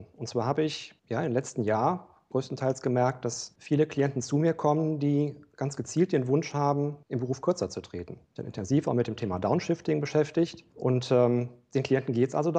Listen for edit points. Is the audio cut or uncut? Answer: cut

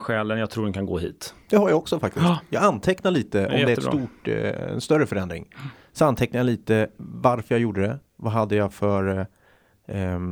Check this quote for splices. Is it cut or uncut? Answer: uncut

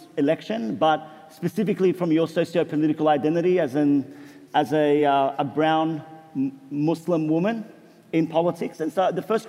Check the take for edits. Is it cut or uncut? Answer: uncut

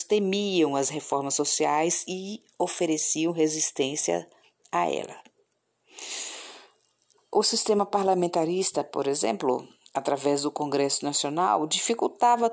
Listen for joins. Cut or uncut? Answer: uncut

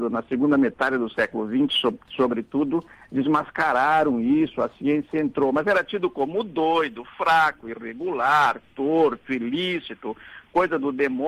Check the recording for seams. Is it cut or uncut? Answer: uncut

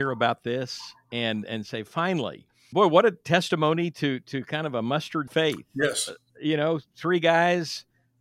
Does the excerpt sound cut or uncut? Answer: cut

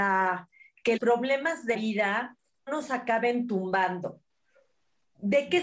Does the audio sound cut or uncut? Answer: cut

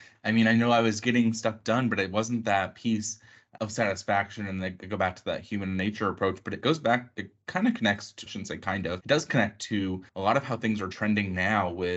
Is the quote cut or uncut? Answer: cut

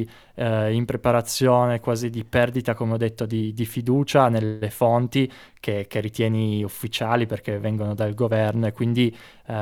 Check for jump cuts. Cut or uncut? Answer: uncut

